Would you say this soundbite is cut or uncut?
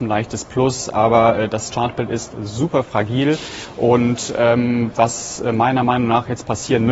uncut